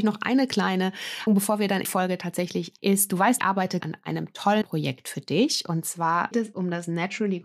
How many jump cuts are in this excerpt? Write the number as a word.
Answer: seven